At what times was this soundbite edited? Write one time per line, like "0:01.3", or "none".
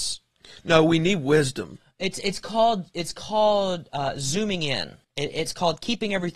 0:05.0